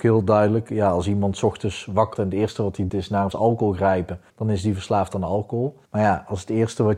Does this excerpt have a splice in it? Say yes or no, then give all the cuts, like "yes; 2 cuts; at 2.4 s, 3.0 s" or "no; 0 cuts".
yes; 5 cuts; at 2.1 s, 2.9 s, 3.3 s, 4.3 s, 5.9 s